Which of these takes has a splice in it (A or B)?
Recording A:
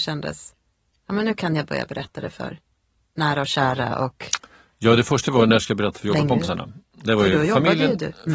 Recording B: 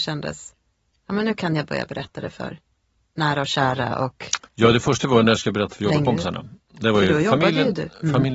B